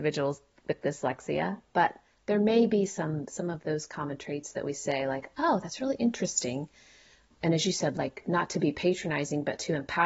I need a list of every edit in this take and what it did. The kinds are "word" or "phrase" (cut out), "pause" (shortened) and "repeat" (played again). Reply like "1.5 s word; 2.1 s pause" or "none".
none